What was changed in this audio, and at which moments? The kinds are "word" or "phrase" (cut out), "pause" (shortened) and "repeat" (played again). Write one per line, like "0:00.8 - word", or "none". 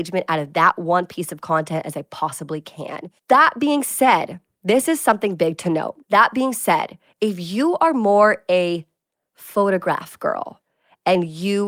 0:03.2 - pause
0:06.0 - pause